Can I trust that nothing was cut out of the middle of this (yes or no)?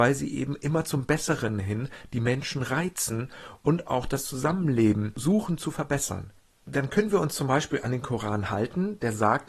yes